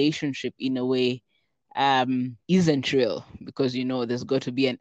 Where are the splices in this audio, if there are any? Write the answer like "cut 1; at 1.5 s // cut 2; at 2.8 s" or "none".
cut 1; at 2.4 s